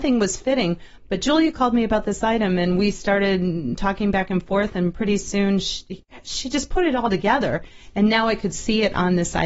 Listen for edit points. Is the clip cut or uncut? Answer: uncut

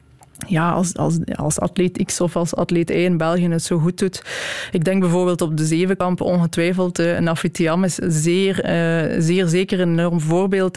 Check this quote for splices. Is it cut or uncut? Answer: uncut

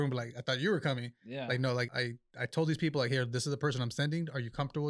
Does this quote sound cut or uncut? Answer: cut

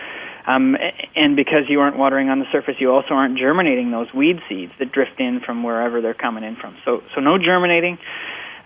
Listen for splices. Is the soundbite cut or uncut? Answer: uncut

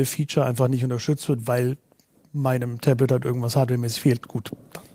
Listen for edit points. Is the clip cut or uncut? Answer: uncut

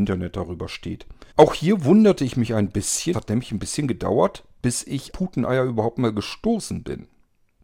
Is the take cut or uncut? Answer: cut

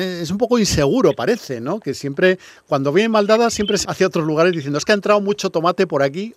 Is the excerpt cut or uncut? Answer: cut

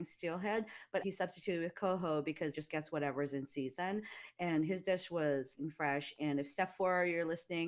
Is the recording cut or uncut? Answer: cut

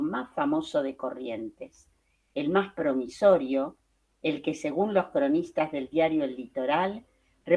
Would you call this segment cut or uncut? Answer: uncut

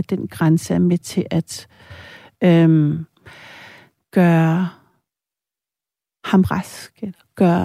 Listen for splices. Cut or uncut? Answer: uncut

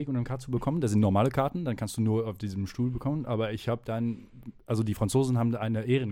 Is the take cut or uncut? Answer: uncut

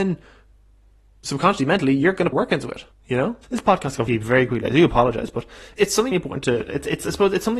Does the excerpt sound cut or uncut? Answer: cut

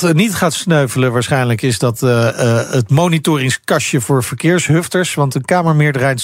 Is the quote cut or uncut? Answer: uncut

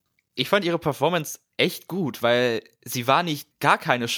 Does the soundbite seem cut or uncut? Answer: uncut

